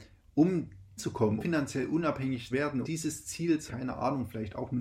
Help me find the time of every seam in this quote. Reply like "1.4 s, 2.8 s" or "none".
1.0 s, 1.4 s, 2.5 s, 2.8 s, 3.7 s